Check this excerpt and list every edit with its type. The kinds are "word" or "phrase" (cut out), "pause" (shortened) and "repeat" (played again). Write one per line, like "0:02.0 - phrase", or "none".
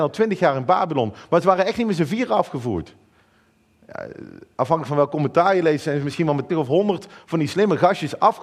0:06.5 - word